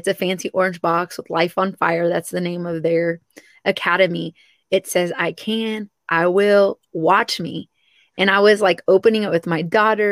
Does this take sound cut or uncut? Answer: uncut